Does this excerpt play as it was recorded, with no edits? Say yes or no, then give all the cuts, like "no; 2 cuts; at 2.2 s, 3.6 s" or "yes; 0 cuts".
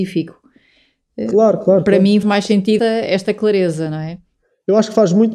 no; 2 cuts; at 2.2 s, 2.8 s